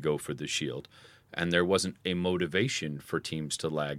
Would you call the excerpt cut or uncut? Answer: uncut